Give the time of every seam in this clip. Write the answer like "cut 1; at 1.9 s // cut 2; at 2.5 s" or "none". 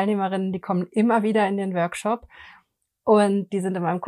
none